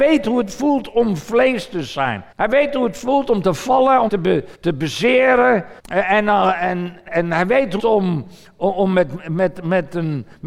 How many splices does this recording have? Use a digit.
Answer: 6